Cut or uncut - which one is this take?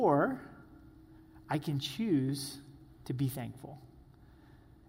uncut